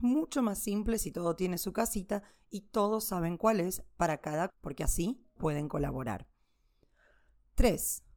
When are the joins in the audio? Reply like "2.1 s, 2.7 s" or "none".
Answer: 4.5 s, 5.4 s